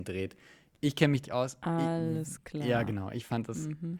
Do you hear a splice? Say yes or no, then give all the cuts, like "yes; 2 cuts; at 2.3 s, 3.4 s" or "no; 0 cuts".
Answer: yes; 1 cut; at 1.2 s